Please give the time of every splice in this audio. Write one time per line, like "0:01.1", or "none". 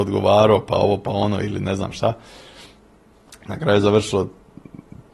none